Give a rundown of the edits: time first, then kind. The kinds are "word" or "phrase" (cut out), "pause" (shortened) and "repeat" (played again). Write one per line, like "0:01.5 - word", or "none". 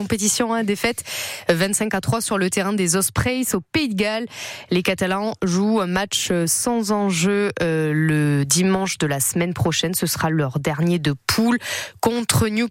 none

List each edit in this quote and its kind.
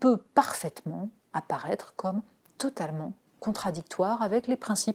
none

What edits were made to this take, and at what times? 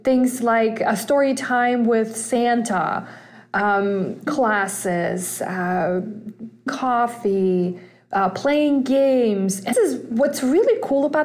0:04.3 - word
0:06.7 - word
0:09.7 - word

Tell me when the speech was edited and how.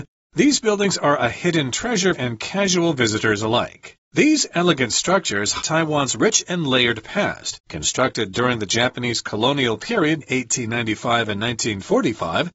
0:02.1 - phrase
0:04.0 - pause
0:05.6 - word
0:07.6 - pause
0:10.2 - word

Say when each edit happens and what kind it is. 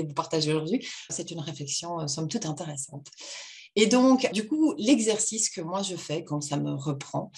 0:01.1 - word
0:04.3 - word

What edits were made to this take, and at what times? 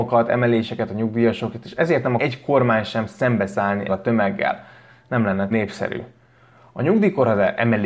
0:02.2 - word
0:03.9 - word
0:05.5 - word

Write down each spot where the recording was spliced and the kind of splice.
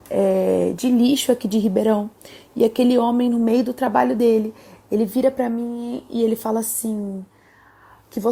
none

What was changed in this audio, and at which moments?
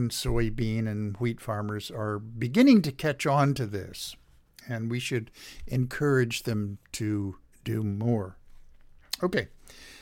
none

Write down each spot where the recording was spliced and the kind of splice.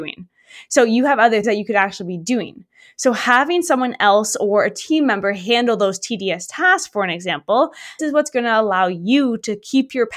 0:01.4 - word
0:08.0 - word

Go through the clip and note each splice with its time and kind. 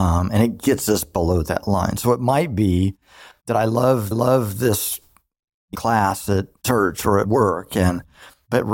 0:04.1 - repeat
0:05.7 - phrase
0:06.6 - pause
0:07.2 - phrase

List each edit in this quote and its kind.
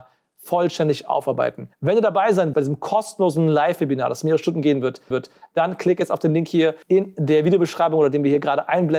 0:01.7 - pause
0:02.5 - word
0:05.1 - repeat
0:06.8 - pause

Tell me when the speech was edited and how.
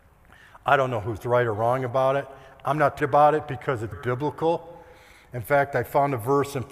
0:03.0 - word
0:03.9 - word

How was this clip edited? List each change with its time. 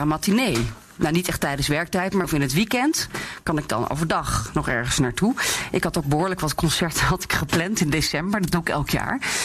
0:02.2 - word

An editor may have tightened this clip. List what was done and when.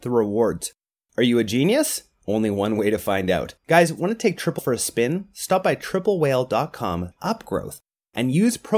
0:03.6 - pause
0:04.6 - word
0:07.1 - word

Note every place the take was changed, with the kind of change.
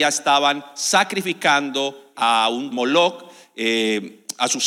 0:02.1 - word
0:02.7 - phrase

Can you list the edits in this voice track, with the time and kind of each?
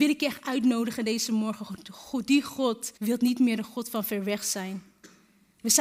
0:03.0 - pause

